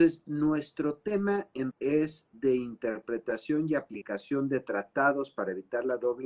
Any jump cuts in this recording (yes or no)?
yes